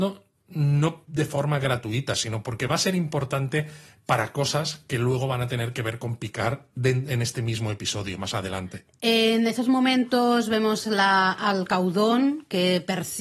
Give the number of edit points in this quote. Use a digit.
0